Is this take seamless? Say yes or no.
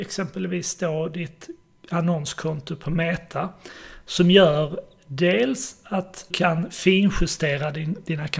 no